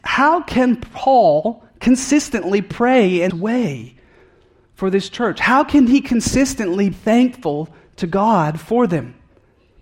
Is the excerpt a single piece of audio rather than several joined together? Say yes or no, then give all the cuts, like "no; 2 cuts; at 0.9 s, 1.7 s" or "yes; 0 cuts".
no; 2 cuts; at 3.3 s, 6.9 s